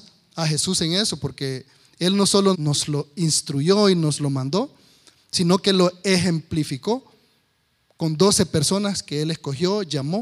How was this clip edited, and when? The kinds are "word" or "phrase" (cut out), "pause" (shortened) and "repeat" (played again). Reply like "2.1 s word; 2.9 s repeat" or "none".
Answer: 2.5 s word

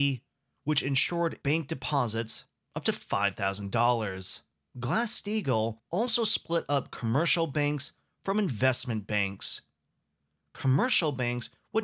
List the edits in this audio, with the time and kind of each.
1.4 s word; 4.5 s pause; 5.8 s pause

